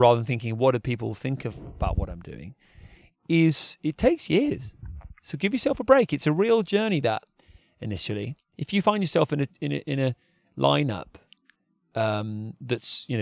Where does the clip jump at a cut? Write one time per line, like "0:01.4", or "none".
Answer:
none

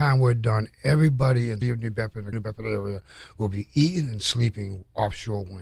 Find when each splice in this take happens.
0:01.6
0:02.3

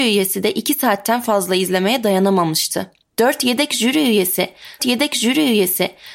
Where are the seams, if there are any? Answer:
0:03.0
0:04.8

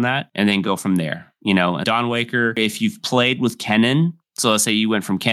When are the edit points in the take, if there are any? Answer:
0:01.8

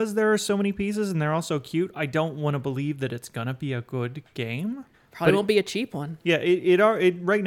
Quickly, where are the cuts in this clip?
0:04.9

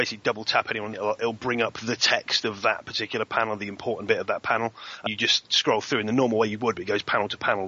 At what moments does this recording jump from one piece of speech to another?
0:00.9
0:05.1

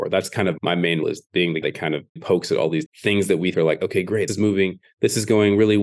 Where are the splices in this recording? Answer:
0:01.0
0:01.6
0:02.2
0:02.9
0:03.5
0:04.3

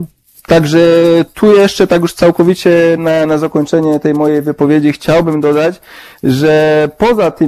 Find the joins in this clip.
none

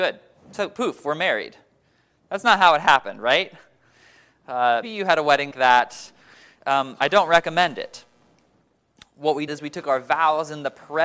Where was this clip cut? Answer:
0:04.8
0:05.5
0:09.5

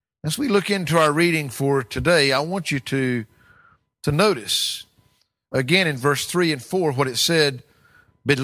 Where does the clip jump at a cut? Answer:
none

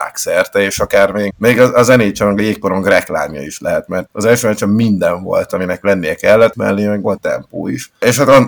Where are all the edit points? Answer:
0:01.3
0:04.1
0:06.5
0:07.2

